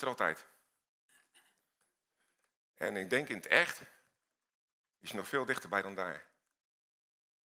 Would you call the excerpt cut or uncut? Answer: uncut